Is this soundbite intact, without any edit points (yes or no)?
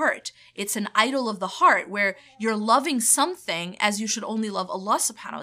yes